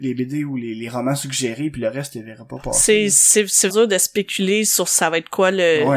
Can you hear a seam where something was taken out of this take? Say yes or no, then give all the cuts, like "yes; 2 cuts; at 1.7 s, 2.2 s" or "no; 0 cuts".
yes; 1 cut; at 3.7 s